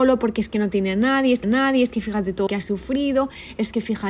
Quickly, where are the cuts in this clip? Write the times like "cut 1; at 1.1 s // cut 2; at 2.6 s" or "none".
cut 1; at 1.4 s // cut 2; at 2.5 s